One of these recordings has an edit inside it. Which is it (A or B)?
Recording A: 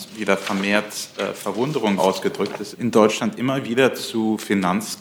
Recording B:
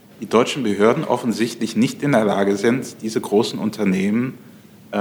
A